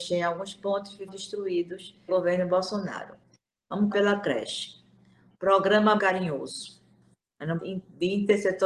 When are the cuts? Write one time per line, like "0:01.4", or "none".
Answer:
0:01.1
0:02.1
0:03.9
0:06.0
0:07.6